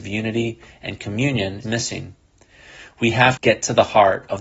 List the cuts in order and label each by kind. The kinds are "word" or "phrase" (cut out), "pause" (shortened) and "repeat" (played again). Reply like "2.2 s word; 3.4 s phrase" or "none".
1.6 s word; 3.4 s word